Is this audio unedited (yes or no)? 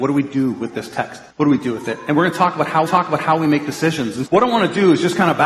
no